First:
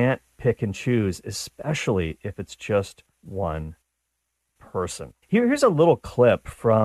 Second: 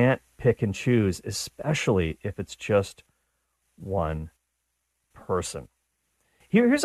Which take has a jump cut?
first; 2 cuts; at 3.1 s, 5.2 s

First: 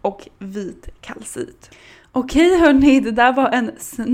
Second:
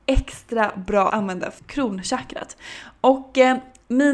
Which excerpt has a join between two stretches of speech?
second; 2 cuts; at 1.1 s, 1.6 s

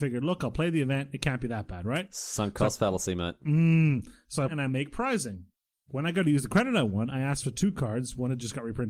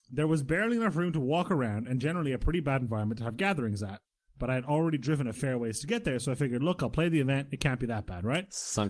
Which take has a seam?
first; 2 cuts; at 4.5 s, 5.7 s

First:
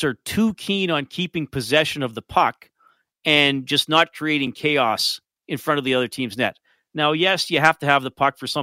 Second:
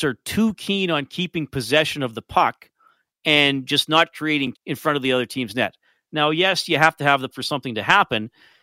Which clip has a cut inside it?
second; 2 cuts; at 4.5 s, 7.3 s

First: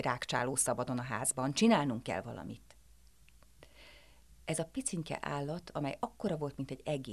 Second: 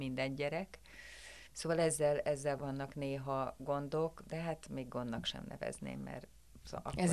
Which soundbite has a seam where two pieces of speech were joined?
second; 2 cuts; at 1.5 s, 2.6 s

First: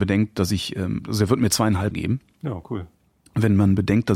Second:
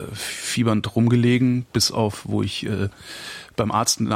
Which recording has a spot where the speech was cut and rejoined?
first; 2 cuts; at 1.0 s, 1.9 s

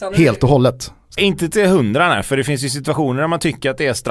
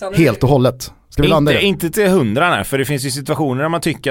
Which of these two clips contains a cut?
first; 1 cut; at 1.2 s

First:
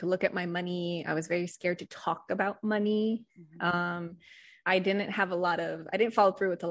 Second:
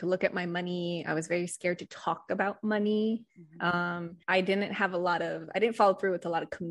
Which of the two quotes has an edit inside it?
second; 1 cut; at 4.2 s

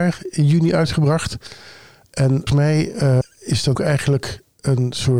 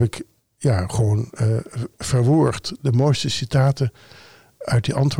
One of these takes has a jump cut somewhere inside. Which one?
first; 3 cuts; at 2.5 s, 3.2 s, 3.7 s

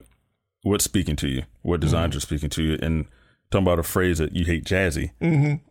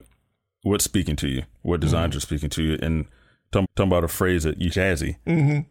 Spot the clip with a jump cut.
second; 2 cuts; at 3.6 s, 4.7 s

